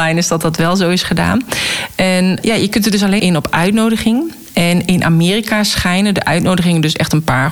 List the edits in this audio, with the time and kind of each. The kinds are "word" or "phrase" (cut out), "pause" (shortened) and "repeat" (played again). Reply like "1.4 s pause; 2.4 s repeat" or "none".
2.4 s word; 3.2 s word